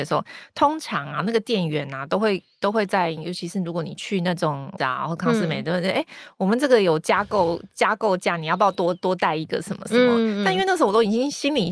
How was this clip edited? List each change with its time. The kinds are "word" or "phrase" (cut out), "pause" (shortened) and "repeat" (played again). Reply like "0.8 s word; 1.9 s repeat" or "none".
4.8 s word